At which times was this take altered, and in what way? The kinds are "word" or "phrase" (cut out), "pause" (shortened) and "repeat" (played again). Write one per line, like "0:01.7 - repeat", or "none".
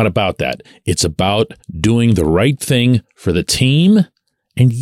0:01.6 - pause